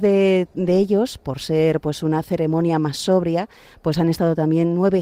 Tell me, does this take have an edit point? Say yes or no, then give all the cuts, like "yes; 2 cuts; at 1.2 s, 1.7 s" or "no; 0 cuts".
no; 0 cuts